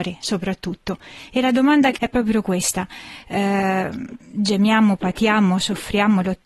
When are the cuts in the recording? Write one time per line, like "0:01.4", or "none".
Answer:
0:02.0